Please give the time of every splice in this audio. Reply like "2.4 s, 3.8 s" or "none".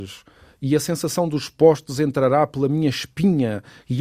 none